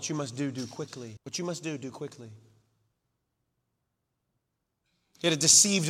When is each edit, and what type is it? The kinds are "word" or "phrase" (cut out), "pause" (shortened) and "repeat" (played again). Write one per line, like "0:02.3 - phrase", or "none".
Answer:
0:01.2 - pause